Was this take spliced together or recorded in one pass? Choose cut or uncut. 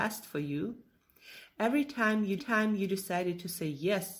cut